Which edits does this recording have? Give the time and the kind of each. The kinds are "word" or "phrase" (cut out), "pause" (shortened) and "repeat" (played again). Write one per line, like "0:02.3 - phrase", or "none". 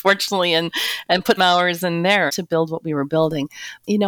0:01.4 - word
0:02.3 - phrase